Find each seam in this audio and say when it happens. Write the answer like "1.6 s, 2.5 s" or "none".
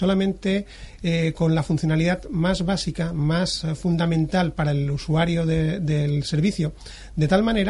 none